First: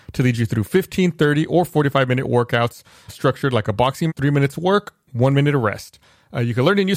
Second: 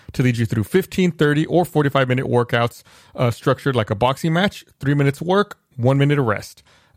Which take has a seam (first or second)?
first